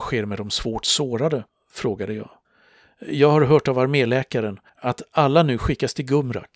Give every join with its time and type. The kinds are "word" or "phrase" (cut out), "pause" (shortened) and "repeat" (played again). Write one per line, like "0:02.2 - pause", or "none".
0:01.5 - pause
0:02.4 - pause
0:04.7 - pause